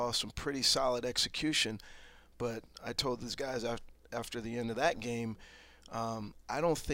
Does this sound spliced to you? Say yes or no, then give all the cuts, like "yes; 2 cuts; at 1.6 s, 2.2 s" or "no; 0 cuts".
no; 0 cuts